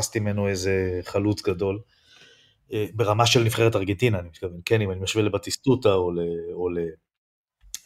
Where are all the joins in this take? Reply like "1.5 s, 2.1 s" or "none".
none